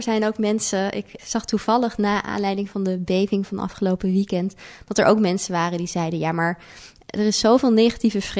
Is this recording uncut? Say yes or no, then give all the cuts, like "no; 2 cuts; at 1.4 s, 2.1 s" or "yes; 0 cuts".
no; 1 cut; at 1.2 s